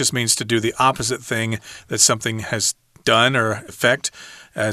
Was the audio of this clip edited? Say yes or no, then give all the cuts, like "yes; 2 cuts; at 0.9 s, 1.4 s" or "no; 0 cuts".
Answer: yes; 1 cut; at 3.7 s